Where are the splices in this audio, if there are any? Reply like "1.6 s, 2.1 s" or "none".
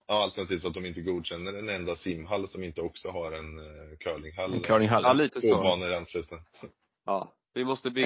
none